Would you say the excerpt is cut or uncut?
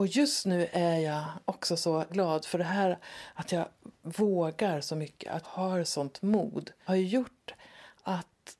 cut